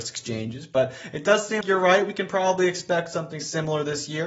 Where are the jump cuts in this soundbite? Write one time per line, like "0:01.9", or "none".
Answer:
0:01.6